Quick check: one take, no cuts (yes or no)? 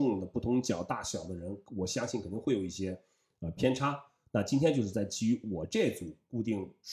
yes